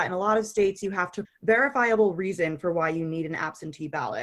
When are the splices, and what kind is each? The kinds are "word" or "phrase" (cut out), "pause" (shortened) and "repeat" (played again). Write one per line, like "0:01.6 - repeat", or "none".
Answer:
0:01.2 - phrase